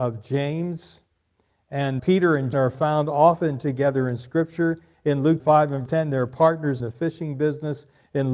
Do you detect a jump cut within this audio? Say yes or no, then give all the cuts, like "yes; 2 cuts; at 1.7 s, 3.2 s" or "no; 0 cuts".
yes; 5 cuts; at 2.0 s, 2.5 s, 5.4 s, 5.9 s, 6.8 s